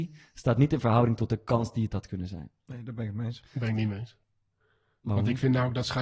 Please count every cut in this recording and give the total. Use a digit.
0